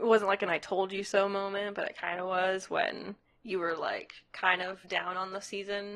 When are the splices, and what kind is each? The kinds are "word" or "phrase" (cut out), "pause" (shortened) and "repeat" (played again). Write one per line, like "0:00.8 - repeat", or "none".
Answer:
0:04.8 - pause